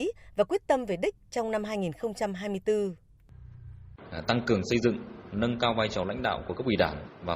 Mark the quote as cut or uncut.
uncut